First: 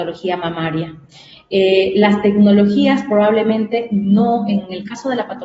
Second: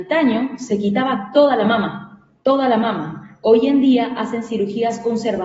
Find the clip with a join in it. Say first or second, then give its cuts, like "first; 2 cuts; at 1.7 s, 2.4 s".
second; 1 cut; at 2.4 s